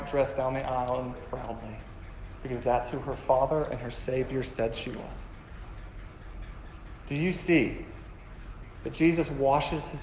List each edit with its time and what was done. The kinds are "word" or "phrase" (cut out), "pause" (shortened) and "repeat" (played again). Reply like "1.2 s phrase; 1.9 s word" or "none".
1.1 s word